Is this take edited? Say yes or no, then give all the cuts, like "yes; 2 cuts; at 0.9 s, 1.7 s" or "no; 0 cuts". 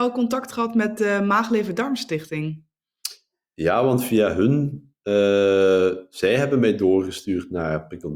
no; 0 cuts